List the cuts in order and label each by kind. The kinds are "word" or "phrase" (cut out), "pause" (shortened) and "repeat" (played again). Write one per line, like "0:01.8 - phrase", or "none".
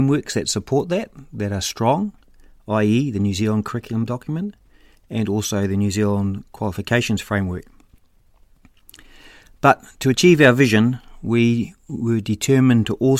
none